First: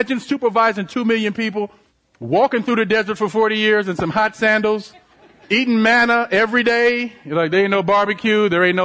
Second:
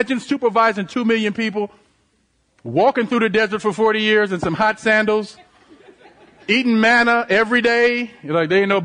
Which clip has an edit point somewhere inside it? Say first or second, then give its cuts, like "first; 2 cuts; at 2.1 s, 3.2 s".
first; 2 cuts; at 1.9 s, 5.1 s